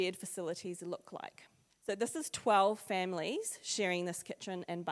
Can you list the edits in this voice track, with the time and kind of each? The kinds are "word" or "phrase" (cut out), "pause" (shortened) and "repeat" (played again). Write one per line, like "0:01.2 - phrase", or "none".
0:01.7 - pause